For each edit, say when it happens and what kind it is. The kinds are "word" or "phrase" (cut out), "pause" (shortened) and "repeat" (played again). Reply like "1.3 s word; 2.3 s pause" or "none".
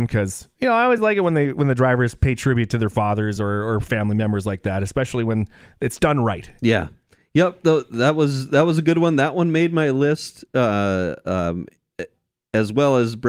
none